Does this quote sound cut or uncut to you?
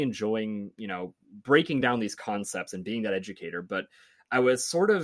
uncut